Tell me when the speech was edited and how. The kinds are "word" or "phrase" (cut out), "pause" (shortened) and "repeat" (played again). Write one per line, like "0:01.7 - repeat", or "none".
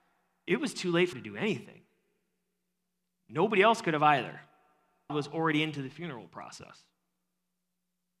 0:01.1 - word
0:05.1 - phrase